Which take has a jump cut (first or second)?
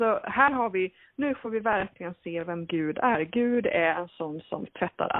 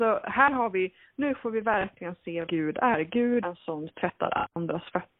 second